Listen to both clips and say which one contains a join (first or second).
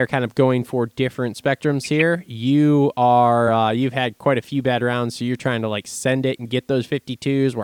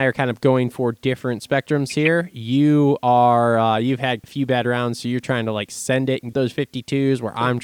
second